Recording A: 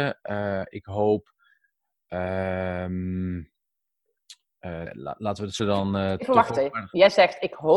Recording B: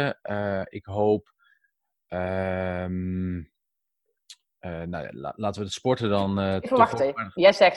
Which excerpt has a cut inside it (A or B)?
A